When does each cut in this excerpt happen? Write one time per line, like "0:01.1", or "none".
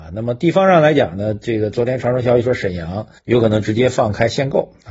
0:03.2